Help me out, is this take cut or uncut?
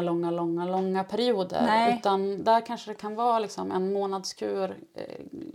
uncut